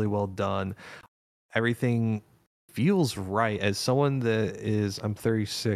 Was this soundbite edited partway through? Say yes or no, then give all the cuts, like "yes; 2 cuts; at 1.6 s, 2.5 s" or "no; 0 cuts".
no; 0 cuts